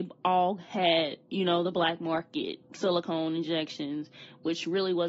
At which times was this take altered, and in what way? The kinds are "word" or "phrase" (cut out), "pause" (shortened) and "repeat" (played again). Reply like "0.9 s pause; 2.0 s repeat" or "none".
1.3 s pause; 2.6 s pause